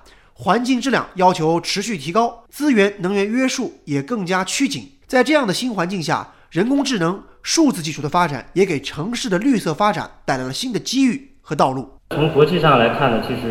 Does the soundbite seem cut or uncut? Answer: cut